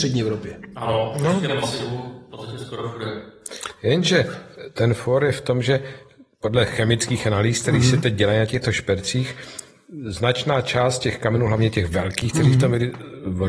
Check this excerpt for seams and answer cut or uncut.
uncut